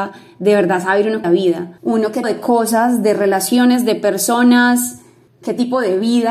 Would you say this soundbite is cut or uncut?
cut